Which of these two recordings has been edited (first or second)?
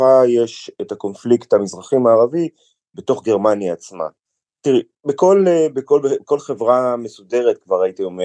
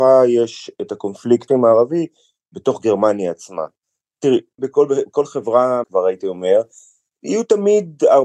second